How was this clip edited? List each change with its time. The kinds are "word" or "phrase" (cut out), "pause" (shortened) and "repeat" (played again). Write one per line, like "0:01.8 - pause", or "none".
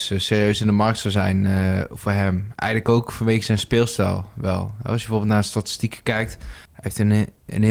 0:06.6 - pause